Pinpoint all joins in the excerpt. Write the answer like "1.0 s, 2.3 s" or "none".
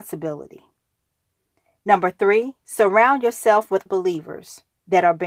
3.9 s